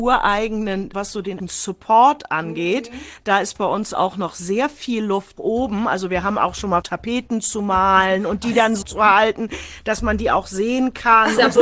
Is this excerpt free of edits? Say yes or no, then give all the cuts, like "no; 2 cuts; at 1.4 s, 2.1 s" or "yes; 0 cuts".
no; 6 cuts; at 0.9 s, 1.4 s, 3.9 s, 5.4 s, 6.8 s, 8.8 s